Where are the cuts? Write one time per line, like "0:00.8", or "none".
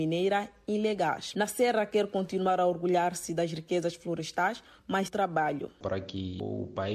0:05.1